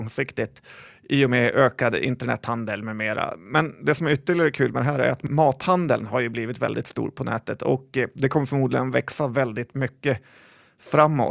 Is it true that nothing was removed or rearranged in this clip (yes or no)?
yes